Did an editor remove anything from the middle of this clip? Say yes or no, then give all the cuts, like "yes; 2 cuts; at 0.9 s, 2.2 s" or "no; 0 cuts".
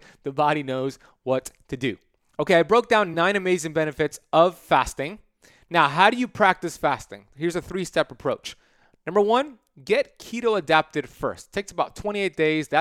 no; 0 cuts